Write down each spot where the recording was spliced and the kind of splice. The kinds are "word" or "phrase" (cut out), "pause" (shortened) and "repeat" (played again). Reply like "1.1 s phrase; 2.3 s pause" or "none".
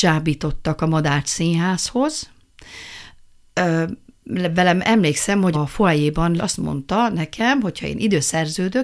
5.5 s word; 6.4 s phrase